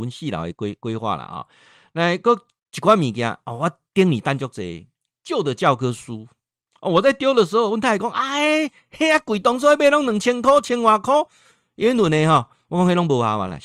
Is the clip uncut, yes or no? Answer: yes